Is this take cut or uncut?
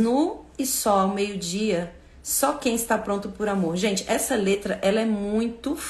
uncut